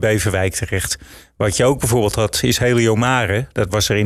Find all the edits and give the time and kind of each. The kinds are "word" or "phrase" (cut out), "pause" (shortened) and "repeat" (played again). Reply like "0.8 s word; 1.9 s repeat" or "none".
none

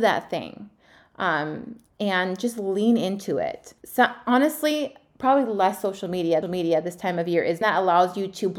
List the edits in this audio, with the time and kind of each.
3.8 s pause; 6.4 s repeat; 7.6 s phrase

